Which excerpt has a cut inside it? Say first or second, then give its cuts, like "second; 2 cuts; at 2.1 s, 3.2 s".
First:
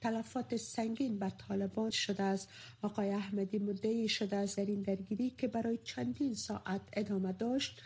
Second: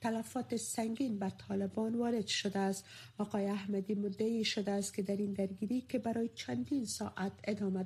first; 2 cuts; at 1.9 s, 4.6 s